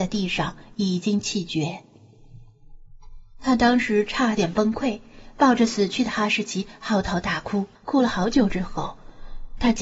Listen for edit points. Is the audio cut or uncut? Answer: cut